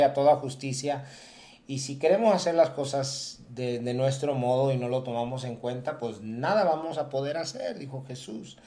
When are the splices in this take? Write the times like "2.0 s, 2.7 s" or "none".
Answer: none